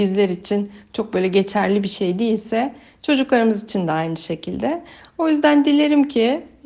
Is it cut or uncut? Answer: uncut